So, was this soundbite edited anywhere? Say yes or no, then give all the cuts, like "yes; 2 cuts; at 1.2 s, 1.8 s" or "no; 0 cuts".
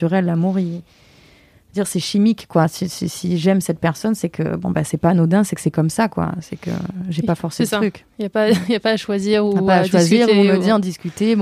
no; 0 cuts